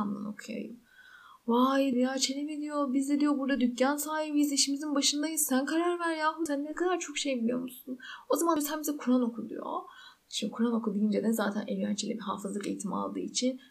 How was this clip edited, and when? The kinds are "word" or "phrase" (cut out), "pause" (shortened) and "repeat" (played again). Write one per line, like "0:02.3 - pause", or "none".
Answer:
none